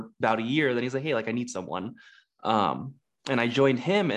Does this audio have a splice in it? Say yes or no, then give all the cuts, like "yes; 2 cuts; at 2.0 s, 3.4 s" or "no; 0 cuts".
no; 0 cuts